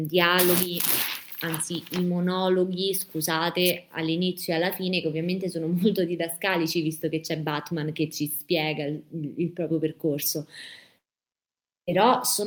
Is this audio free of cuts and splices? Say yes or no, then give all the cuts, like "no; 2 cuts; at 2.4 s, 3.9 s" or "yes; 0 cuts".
yes; 0 cuts